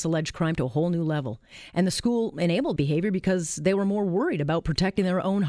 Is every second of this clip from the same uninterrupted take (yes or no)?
no